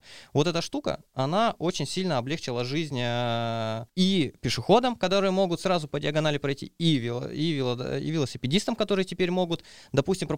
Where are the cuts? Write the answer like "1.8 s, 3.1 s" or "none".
3.9 s